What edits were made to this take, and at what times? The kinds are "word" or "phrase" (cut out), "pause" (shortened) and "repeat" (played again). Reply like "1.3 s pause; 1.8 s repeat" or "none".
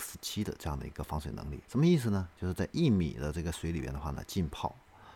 1.6 s pause